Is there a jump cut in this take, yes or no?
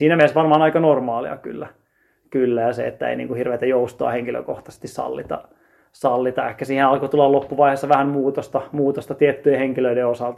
no